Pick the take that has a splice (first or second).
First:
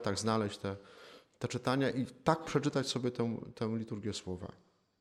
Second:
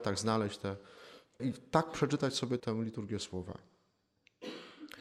second